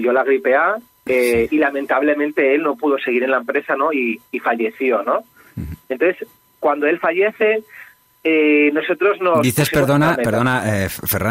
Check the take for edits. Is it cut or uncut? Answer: uncut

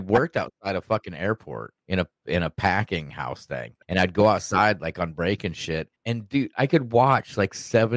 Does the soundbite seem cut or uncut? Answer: cut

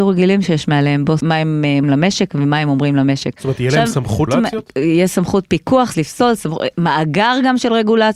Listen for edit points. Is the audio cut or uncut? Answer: cut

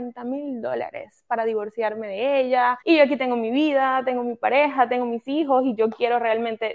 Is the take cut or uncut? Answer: cut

